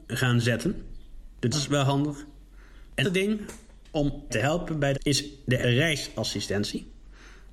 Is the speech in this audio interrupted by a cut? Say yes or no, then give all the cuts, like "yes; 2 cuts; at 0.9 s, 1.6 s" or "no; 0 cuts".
yes; 5 cuts; at 1.5 s, 3.0 s, 4.3 s, 4.9 s, 5.6 s